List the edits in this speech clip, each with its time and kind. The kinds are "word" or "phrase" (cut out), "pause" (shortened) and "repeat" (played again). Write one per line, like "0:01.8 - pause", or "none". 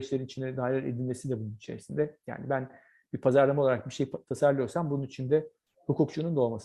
none